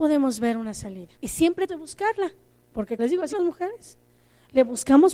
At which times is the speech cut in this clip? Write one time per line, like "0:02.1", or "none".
0:01.2
0:01.7
0:03.0
0:03.3